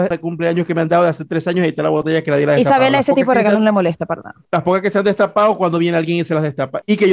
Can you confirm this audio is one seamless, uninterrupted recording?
yes; 0 cuts

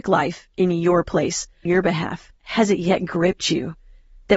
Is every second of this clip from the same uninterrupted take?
no; 2 cuts; at 1.7 s, 2.4 s

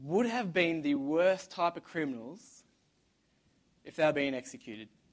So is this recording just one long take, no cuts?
yes; 0 cuts

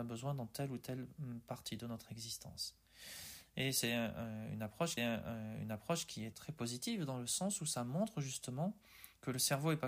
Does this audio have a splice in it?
yes; 2 cuts; at 5.0 s, 6.3 s

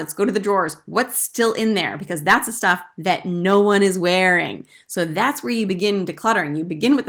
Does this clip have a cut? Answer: no; 0 cuts

